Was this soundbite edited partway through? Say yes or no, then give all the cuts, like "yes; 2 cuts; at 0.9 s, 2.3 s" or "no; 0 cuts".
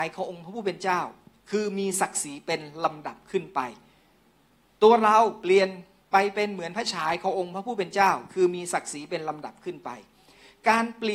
no; 0 cuts